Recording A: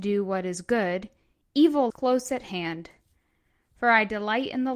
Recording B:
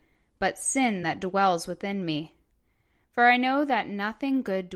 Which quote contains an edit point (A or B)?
A